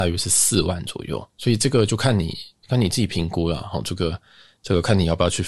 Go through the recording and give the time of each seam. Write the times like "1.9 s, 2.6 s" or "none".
1.3 s